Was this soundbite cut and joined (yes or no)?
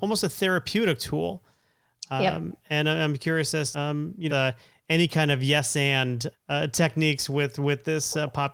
yes